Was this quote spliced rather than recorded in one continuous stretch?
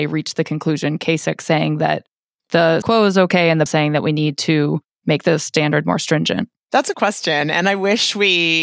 yes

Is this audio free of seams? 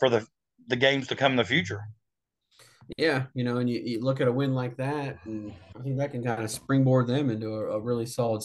yes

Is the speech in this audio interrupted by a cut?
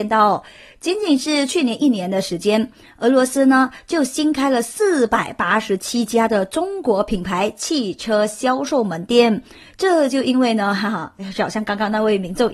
no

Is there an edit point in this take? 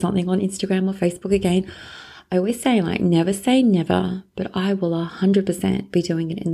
no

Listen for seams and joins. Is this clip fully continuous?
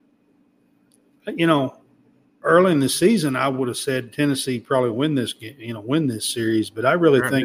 yes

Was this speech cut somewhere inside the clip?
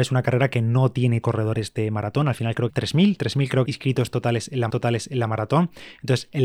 yes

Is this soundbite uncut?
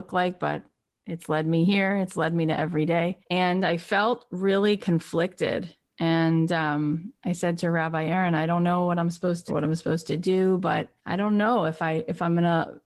no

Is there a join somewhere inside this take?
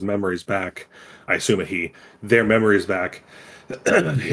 no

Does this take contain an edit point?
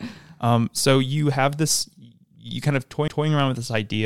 yes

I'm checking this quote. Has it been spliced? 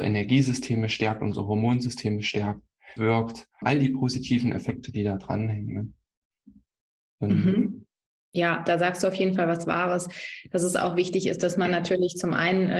yes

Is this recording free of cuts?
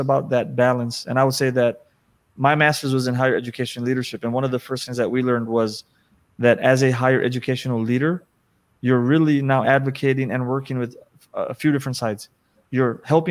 yes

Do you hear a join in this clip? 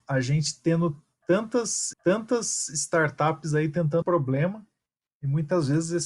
yes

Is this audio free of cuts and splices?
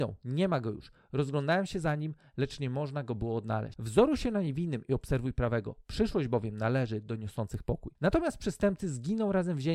yes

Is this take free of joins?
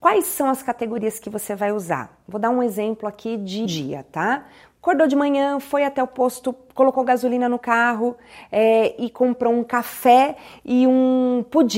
no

